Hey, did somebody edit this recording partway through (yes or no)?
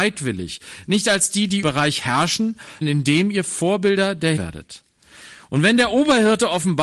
yes